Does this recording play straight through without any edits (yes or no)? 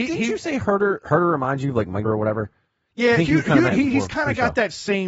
no